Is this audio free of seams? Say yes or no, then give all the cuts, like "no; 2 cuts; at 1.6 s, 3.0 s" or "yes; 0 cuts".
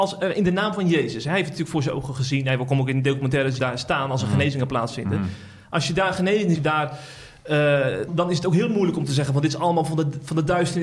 no; 3 cuts; at 3.6 s, 6.5 s, 8.1 s